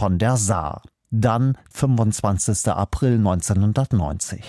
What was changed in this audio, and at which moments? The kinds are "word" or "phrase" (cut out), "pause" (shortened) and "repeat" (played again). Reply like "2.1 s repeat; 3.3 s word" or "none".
1.7 s word